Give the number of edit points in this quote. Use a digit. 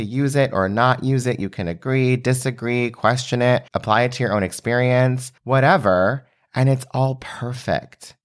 2